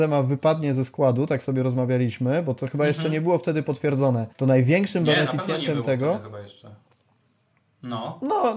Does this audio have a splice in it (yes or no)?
yes